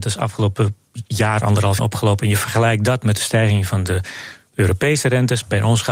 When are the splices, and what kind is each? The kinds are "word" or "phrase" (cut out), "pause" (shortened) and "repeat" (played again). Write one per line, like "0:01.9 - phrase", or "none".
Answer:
0:01.8 - phrase